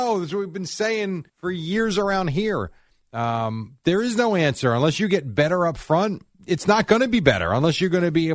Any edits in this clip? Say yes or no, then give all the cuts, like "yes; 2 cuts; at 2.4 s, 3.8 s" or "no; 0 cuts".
yes; 2 cuts; at 1.3 s, 6.3 s